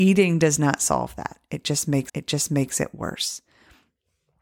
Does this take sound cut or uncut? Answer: cut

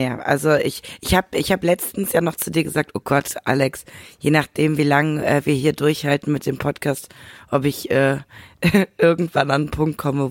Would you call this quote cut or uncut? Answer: uncut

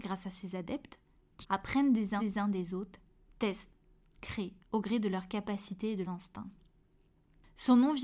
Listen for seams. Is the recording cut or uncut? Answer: cut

